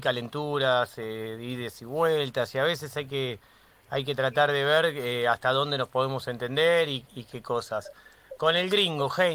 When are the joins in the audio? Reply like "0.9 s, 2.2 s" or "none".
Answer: none